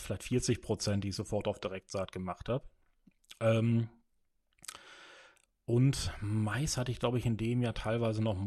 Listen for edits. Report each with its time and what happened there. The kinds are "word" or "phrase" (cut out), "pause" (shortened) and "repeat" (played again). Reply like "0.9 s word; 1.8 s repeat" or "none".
none